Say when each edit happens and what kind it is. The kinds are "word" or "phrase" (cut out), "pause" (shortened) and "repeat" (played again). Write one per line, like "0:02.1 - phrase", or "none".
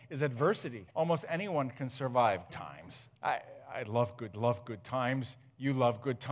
0:00.9 - pause
0:02.5 - word
0:03.1 - pause
0:04.3 - repeat